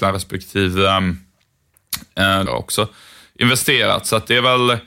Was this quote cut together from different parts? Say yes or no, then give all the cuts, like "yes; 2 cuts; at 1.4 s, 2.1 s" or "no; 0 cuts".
yes; 1 cut; at 2.5 s